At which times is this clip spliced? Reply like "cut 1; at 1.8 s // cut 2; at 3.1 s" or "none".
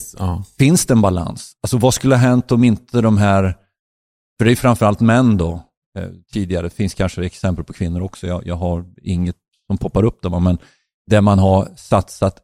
none